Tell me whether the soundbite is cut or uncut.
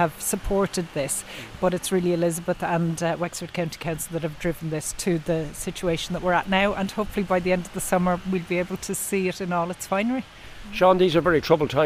uncut